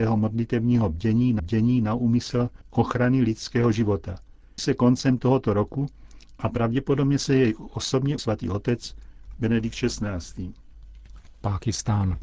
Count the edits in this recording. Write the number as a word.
three